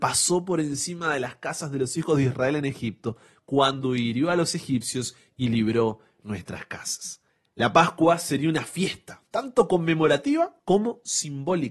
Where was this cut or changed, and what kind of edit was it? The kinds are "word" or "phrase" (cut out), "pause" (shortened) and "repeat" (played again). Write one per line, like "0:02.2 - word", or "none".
0:07.3 - pause
0:10.6 - pause